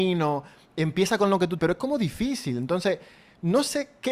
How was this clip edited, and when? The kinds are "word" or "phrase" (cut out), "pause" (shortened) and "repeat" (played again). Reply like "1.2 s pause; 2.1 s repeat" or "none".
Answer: 1.6 s word